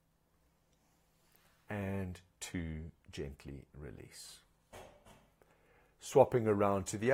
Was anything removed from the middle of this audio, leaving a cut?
no; 0 cuts

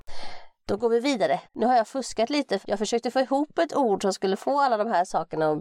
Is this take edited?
yes; 2 cuts; at 1.4 s, 2.6 s

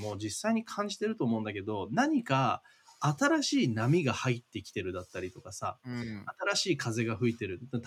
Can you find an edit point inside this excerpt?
no; 0 cuts

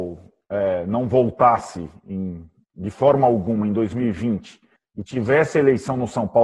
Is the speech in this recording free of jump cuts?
no; 1 cut; at 4.8 s

